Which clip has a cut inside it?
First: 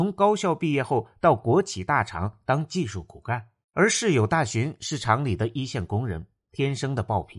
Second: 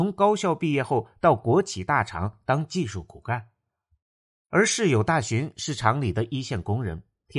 first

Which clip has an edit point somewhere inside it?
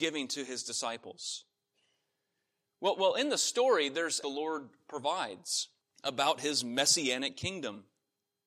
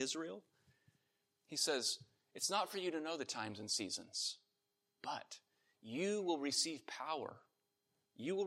first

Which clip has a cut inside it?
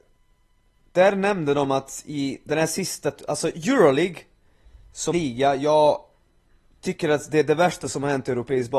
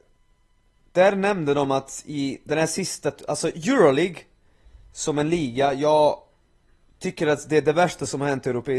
first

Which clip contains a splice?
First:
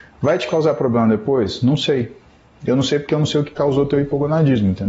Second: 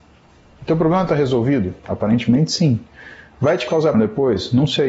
second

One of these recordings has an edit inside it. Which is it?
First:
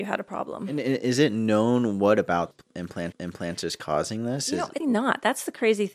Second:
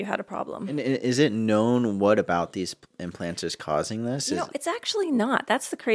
first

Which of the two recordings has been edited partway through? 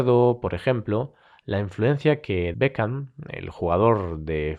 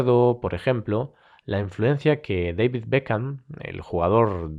first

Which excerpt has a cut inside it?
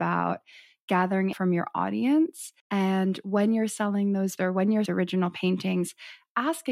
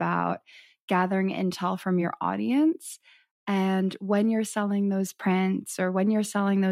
first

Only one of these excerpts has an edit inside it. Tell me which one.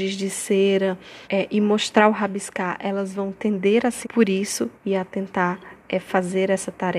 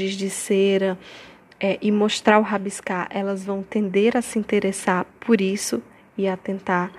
first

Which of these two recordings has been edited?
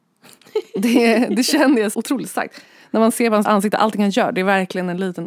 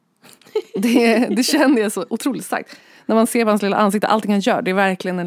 first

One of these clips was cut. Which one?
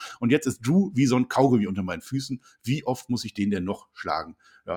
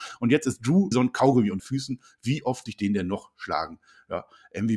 second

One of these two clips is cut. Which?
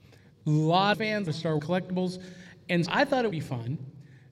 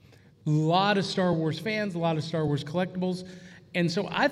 first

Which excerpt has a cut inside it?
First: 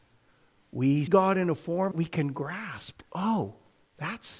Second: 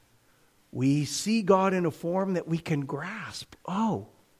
first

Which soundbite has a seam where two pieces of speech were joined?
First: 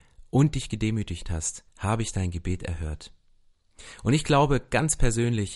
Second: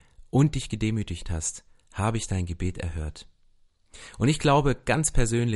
first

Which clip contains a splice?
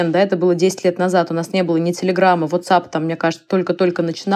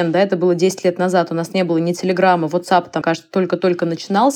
second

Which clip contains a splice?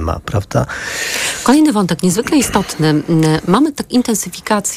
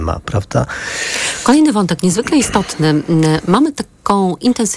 first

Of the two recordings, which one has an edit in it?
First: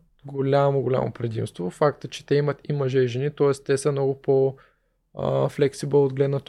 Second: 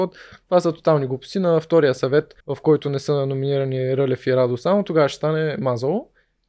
second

